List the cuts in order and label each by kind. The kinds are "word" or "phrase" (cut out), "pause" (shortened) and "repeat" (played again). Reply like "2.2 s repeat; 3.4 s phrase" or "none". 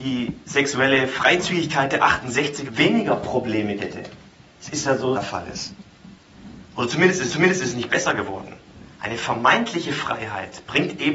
2.7 s word; 3.8 s word; 5.1 s phrase; 7.3 s repeat; 8.9 s pause